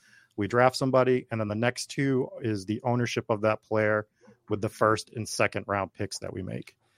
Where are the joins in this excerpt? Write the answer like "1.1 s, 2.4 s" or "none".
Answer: none